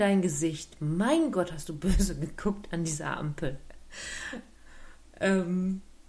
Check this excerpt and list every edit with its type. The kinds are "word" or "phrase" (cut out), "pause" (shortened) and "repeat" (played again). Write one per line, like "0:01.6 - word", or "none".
none

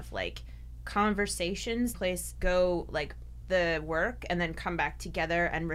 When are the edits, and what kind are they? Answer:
0:01.9 - word
0:02.4 - word
0:03.4 - word

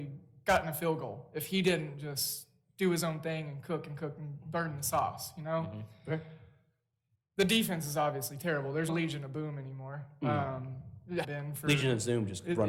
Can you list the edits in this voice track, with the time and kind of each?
0:08.9 - word
0:11.2 - word

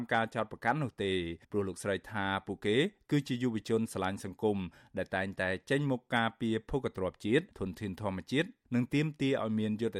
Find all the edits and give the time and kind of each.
0:01.4 - pause
0:07.5 - pause

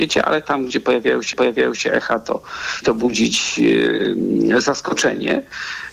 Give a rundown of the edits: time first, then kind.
0:01.3 - repeat
0:02.8 - word

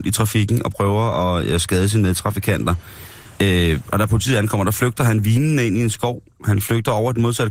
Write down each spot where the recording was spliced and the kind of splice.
0:03.3 - pause

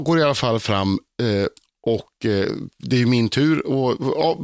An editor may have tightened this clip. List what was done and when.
0:01.6 - pause
0:02.7 - pause

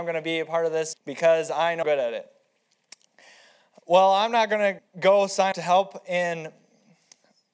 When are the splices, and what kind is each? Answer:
0:00.9 - word
0:01.8 - word
0:04.8 - word
0:05.5 - word

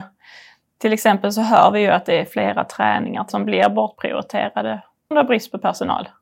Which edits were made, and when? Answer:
0:03.3 - word
0:05.1 - word

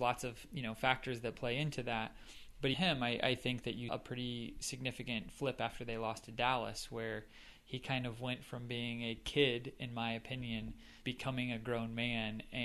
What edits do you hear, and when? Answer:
0:02.7 - word
0:03.9 - word
0:11.0 - word

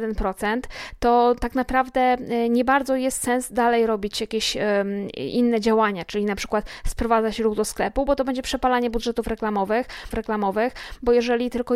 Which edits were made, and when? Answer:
0:10.1 - repeat

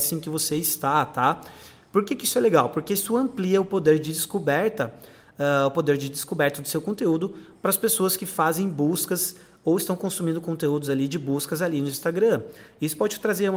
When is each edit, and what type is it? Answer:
none

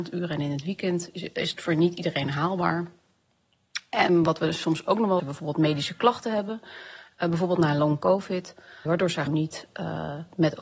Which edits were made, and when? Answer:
0:05.2 - phrase
0:08.9 - word
0:09.3 - word

